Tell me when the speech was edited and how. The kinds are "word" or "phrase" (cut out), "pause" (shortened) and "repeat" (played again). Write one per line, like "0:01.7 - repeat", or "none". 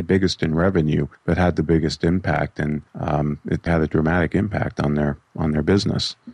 0:01.1 - pause
0:02.9 - pause
0:03.7 - word